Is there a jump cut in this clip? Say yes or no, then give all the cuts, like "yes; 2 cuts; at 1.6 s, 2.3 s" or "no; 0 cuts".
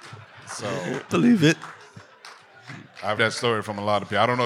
yes; 2 cuts; at 1.1 s, 3.2 s